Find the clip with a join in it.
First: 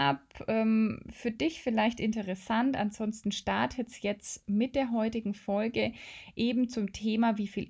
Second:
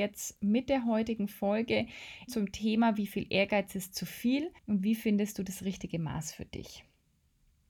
second; 2 cuts; at 2.3 s, 4.6 s

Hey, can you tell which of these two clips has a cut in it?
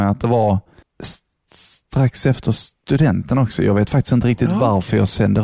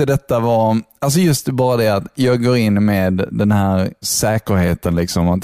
second; 1 cut; at 4.0 s

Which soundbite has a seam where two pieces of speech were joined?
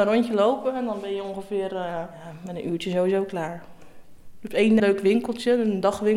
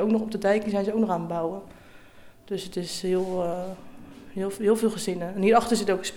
first; 1 cut; at 4.8 s

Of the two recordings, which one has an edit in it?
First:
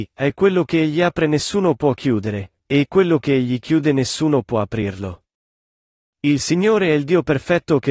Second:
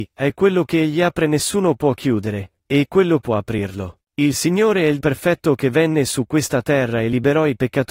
second; 3 cuts; at 3.2 s, 4.0 s, 5.0 s

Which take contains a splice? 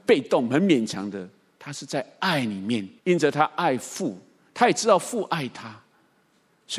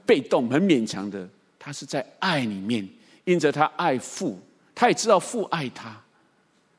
first; 1 cut; at 3.0 s

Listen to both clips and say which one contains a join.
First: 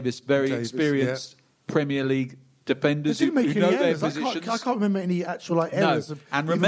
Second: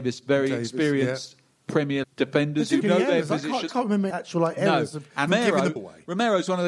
second; 6 cuts; at 2.0 s, 2.8 s, 3.7 s, 4.1 s, 5.3 s, 5.8 s

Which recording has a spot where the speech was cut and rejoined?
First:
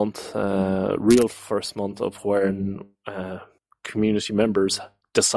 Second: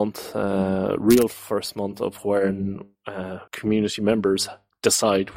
second; 1 cut; at 3.5 s

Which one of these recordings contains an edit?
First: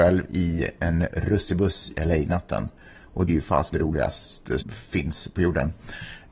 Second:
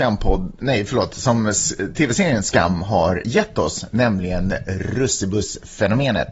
first; 4 cuts; at 1.9 s, 3.3 s, 3.7 s, 4.6 s

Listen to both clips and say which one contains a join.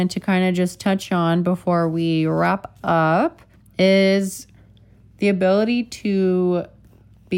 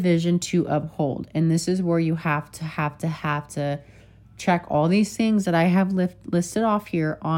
first; 1 cut; at 3.5 s

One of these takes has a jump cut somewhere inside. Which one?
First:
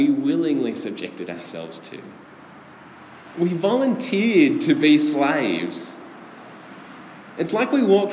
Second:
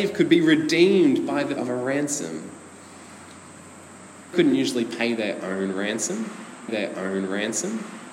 second; 3 cuts; at 1.6 s, 4.3 s, 6.7 s

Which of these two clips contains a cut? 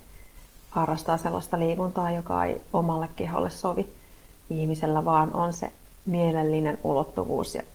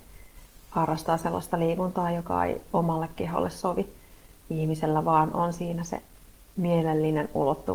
first; 2 cuts; at 5.5 s, 6.0 s

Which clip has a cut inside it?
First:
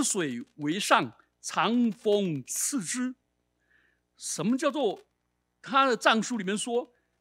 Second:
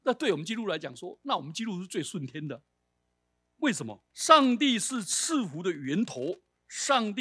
second; 1 cut; at 4.1 s

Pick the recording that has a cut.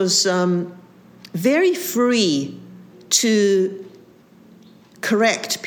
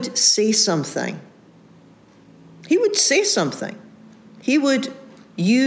first; 1 cut; at 2.9 s

